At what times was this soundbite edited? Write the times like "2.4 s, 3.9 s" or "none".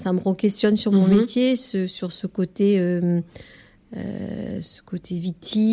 none

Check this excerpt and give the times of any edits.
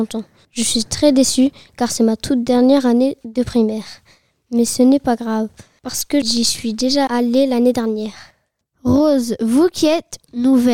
none

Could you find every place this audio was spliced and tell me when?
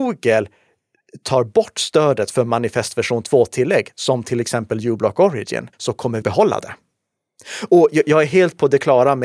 5.7 s, 6.2 s

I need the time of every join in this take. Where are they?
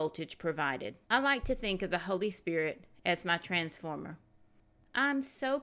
1.0 s

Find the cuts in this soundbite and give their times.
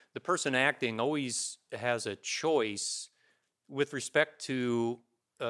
none

